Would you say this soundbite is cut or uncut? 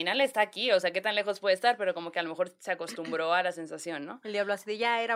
uncut